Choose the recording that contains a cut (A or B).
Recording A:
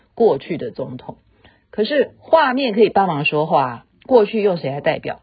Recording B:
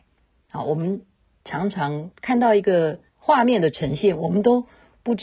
B